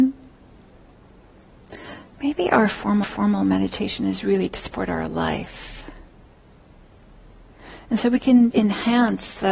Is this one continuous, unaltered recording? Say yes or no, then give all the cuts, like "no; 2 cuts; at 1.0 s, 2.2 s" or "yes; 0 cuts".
no; 2 cuts; at 3.0 s, 8.5 s